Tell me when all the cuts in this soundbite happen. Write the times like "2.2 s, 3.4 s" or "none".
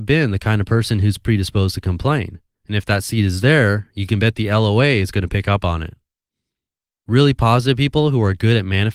none